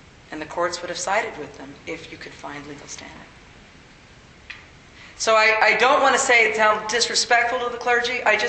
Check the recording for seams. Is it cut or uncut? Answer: uncut